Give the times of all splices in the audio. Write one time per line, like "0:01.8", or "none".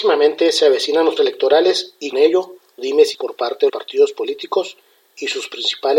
0:01.2
0:02.1
0:02.8
0:03.1
0:03.7